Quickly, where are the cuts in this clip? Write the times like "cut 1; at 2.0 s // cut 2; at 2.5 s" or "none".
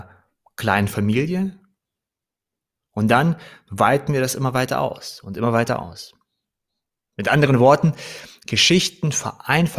none